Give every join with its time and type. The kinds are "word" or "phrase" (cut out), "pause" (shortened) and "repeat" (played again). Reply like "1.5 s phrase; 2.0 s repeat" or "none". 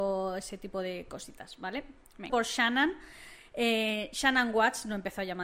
2.3 s word